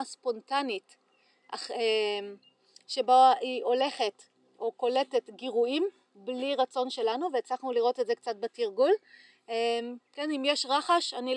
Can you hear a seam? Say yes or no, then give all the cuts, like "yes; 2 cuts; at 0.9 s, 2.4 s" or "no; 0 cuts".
no; 0 cuts